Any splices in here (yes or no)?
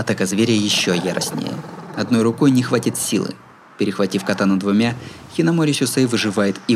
no